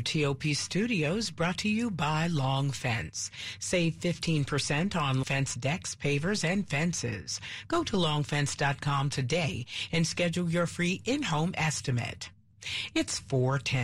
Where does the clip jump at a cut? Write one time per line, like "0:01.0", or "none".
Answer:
0:05.2

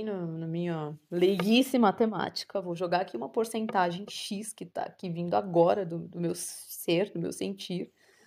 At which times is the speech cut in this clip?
none

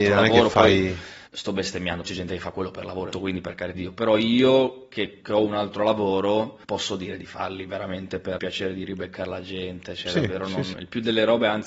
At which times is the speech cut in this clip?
0:01.3
0:02.0
0:03.1
0:03.7
0:05.2
0:06.6
0:08.4
0:10.7

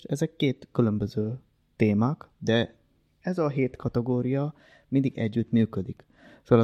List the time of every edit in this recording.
none

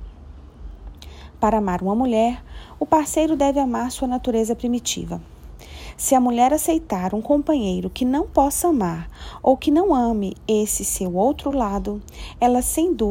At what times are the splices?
none

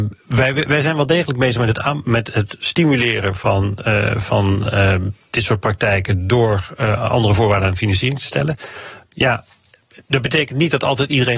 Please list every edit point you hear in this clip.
none

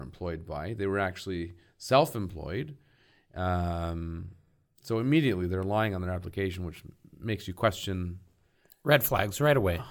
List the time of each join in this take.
none

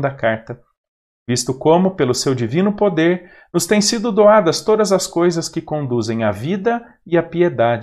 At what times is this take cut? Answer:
none

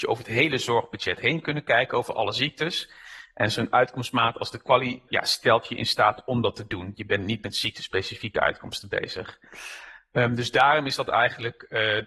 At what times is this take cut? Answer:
0:05.1

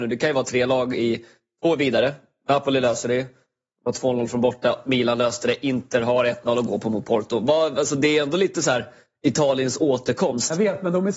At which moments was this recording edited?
none

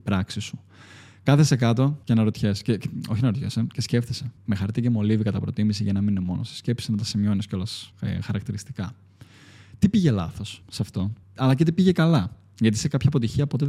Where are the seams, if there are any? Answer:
0:02.0
0:04.4
0:07.9
0:10.6
0:11.2

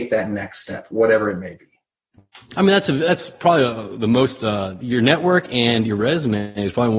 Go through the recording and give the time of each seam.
none

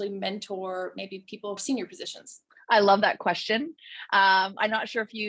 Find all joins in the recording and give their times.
0:01.6
0:02.5

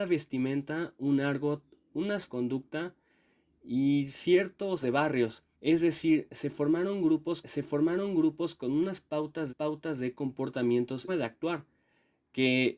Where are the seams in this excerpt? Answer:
0:02.3
0:04.8
0:05.5
0:07.4
0:09.5
0:11.1

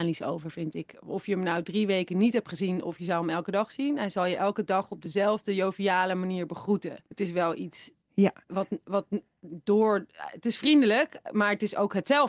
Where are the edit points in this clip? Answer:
0:07.1

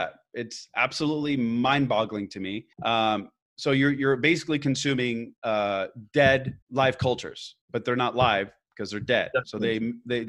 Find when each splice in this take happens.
0:02.7
0:05.4
0:06.6
0:07.6

